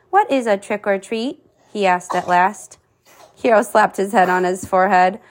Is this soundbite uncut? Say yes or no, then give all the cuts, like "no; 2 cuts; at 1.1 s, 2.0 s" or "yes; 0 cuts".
yes; 0 cuts